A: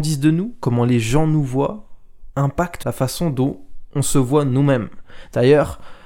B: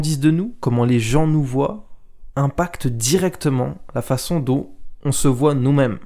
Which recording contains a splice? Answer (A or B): A